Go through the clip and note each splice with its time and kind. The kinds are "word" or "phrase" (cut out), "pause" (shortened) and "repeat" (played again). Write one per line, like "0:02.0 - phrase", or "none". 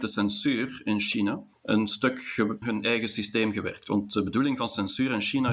0:01.5 - pause
0:02.6 - word